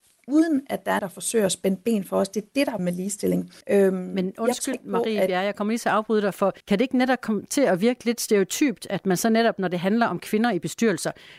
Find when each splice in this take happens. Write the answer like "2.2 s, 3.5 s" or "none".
1.0 s, 2.8 s, 3.6 s, 4.7 s, 6.6 s